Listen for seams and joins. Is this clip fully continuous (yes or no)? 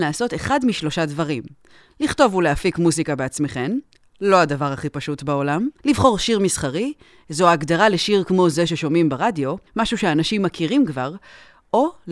no